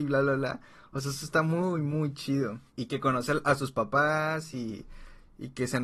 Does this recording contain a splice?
yes; 1 cut; at 2.7 s

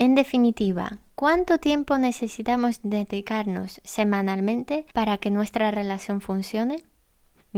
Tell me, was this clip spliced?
yes; 1 cut; at 4.9 s

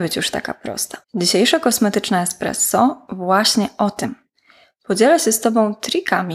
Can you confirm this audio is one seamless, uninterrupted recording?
no; 1 cut; at 1.0 s

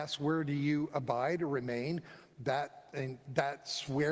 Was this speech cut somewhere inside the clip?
no; 0 cuts

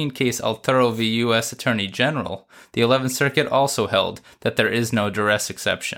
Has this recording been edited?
no; 0 cuts

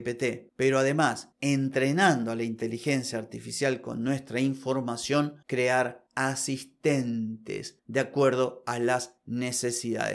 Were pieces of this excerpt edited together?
yes; 1 cut; at 5.4 s

